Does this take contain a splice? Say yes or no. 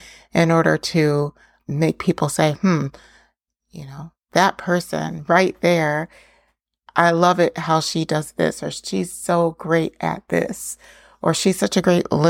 no